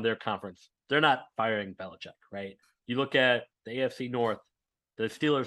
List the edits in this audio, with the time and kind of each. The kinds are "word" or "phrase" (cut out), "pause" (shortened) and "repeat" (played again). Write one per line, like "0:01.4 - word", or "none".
none